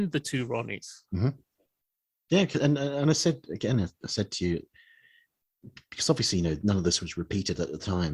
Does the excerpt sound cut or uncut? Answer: uncut